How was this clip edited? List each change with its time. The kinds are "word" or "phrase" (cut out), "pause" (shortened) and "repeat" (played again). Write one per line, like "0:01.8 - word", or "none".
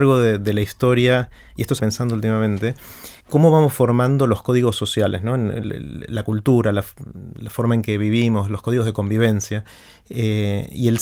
0:01.8 - phrase
0:03.2 - pause